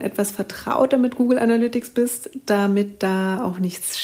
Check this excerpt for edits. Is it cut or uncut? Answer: uncut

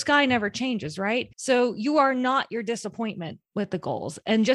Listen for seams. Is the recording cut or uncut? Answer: cut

